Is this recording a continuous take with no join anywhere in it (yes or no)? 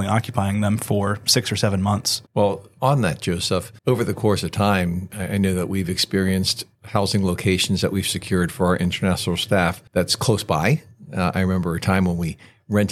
no